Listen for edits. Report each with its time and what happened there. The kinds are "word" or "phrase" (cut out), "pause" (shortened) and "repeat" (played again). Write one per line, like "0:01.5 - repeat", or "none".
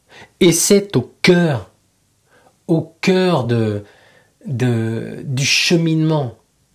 none